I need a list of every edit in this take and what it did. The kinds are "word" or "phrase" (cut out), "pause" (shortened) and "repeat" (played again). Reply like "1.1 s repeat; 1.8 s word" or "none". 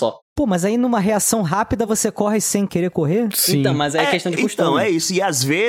none